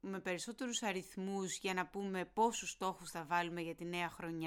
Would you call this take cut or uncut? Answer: uncut